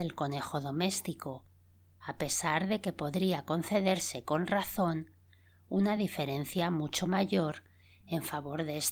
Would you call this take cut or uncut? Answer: uncut